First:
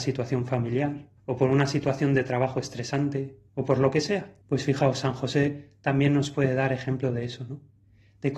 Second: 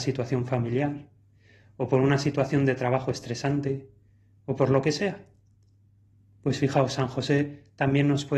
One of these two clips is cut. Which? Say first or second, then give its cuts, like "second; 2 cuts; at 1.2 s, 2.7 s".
first; 3 cuts; at 1.2 s, 3.5 s, 4.4 s